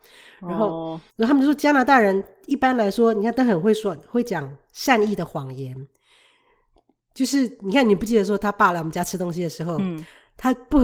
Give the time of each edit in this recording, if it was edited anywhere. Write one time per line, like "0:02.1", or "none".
0:01.1